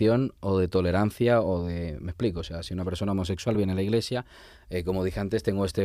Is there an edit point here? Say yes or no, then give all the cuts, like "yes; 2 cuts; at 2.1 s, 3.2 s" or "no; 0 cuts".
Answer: no; 0 cuts